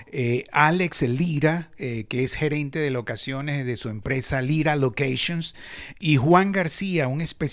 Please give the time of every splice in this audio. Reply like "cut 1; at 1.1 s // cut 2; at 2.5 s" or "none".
none